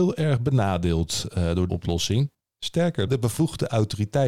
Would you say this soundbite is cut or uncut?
cut